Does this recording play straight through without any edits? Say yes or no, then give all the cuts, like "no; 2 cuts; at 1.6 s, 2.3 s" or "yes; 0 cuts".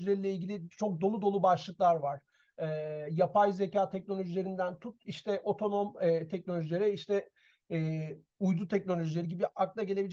yes; 0 cuts